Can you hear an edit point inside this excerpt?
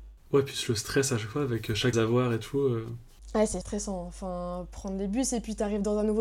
yes; 2 cuts; at 1.9 s, 3.6 s

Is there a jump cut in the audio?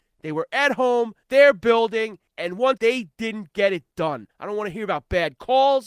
yes; 4 cuts; at 1.2 s, 2.3 s, 2.8 s, 4.3 s

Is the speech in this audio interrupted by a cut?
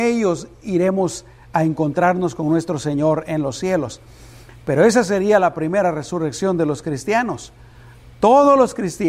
no; 0 cuts

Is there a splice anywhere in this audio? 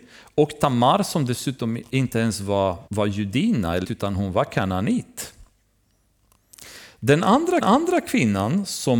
yes; 3 cuts; at 2.9 s, 3.8 s, 7.6 s

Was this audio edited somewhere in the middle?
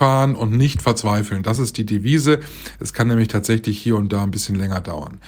no; 0 cuts

